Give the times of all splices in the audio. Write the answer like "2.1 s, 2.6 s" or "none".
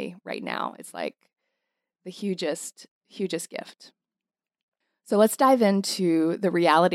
none